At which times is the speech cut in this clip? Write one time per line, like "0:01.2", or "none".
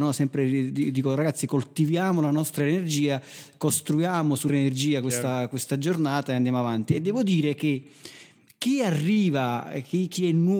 0:04.5